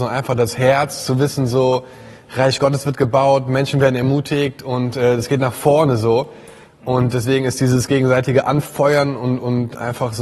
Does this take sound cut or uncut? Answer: uncut